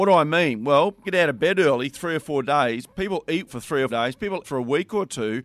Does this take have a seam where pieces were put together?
yes; 4 cuts; at 1.0 s, 3.5 s, 3.9 s, 4.4 s

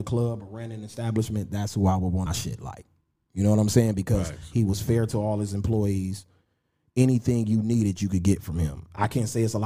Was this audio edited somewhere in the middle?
yes; 1 cut; at 2.3 s

